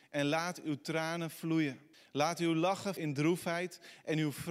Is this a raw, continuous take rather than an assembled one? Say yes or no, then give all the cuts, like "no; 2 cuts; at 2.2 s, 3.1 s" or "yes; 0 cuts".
no; 2 cuts; at 1.9 s, 3.0 s